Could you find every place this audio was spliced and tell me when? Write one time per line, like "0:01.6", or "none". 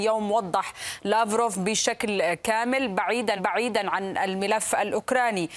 0:03.4